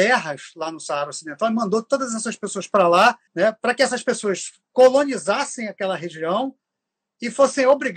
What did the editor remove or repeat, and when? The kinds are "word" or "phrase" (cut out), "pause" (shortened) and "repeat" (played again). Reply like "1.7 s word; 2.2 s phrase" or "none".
3.3 s pause